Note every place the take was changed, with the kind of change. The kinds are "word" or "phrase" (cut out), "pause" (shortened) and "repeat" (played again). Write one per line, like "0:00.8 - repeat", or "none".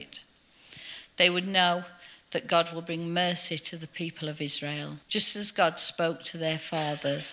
0:05.0 - pause